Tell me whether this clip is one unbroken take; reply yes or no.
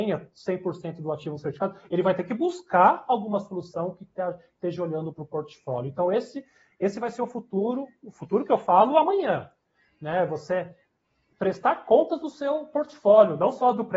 yes